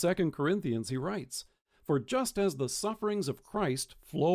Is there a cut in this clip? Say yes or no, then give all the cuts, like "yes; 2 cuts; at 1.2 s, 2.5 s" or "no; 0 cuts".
no; 0 cuts